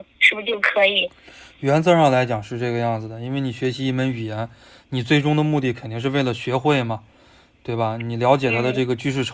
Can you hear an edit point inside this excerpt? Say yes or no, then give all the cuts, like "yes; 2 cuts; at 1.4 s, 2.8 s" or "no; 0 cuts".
no; 0 cuts